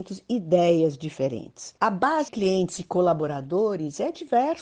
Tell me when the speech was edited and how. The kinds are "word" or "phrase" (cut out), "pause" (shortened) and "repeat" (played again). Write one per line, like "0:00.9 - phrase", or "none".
0:01.8 - pause
0:02.3 - word